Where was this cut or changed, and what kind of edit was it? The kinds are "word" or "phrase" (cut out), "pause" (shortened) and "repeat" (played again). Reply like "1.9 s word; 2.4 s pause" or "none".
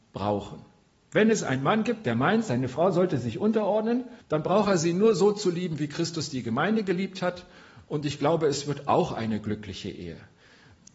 4.2 s pause